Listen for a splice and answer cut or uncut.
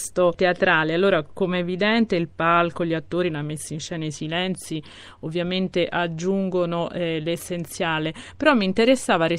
uncut